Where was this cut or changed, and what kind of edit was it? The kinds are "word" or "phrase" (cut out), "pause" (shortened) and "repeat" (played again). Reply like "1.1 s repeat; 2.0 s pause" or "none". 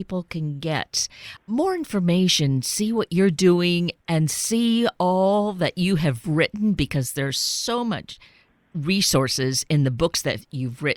none